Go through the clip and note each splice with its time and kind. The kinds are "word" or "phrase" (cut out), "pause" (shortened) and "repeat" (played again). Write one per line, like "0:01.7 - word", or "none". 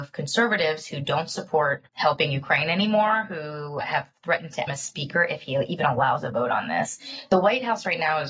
0:01.9 - pause
0:03.8 - word
0:04.7 - phrase